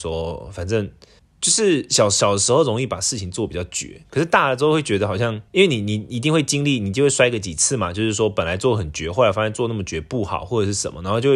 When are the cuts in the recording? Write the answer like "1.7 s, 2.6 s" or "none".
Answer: 1.2 s, 5.5 s

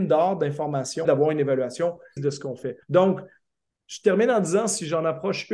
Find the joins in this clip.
1.0 s, 2.2 s, 2.8 s

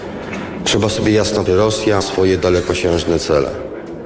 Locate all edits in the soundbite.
1.5 s, 2.0 s

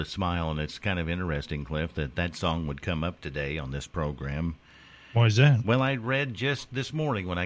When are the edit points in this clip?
none

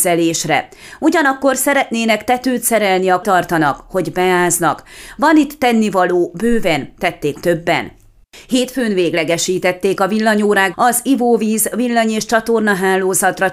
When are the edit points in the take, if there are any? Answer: 3.2 s, 7.4 s, 10.7 s

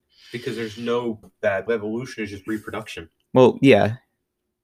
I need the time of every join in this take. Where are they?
1.2 s, 1.7 s

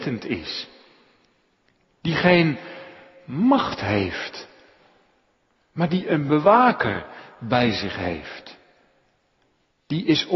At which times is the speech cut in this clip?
none

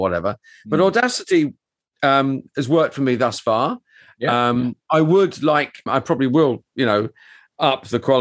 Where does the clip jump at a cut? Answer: 5.9 s

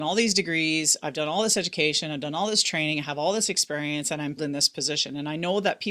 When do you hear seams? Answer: 4.4 s

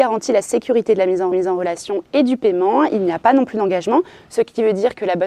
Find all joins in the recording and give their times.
1.3 s

